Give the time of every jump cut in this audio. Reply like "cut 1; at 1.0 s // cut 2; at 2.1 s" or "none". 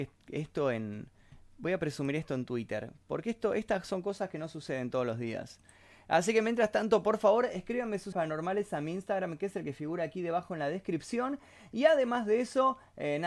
cut 1; at 8.1 s